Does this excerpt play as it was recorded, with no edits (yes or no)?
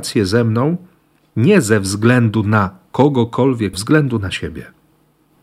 no